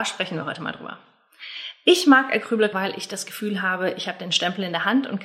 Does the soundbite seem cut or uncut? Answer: cut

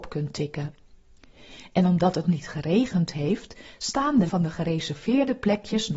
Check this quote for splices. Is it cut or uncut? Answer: cut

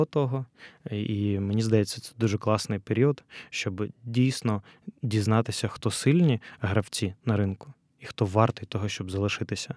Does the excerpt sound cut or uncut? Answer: cut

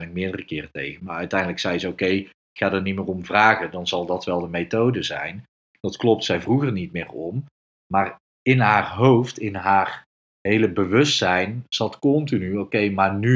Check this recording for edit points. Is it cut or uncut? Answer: uncut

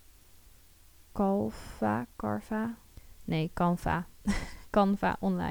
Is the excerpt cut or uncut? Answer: uncut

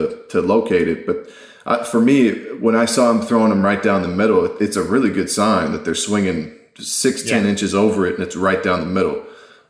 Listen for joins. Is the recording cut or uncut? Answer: uncut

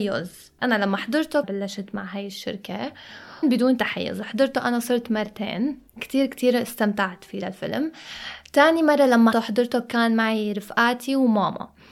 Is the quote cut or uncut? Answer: cut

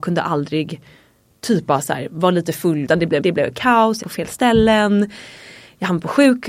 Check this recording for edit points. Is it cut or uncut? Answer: cut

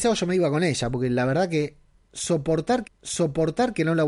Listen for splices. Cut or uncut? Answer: cut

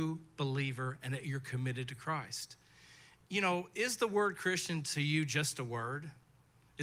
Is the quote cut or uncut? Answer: uncut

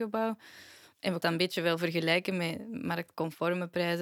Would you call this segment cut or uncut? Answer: cut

